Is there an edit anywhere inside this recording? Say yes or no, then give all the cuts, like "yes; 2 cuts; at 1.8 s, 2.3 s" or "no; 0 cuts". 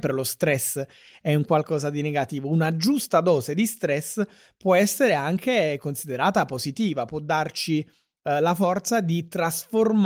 no; 0 cuts